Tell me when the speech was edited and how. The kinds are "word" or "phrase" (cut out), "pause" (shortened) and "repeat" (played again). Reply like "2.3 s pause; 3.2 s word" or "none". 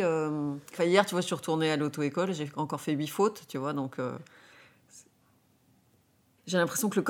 none